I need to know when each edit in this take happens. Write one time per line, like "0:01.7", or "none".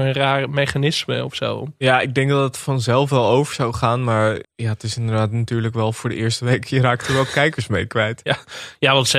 0:04.4